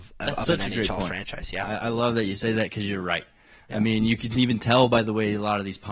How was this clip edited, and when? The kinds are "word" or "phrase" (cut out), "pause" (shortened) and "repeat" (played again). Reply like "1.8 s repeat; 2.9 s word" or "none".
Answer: none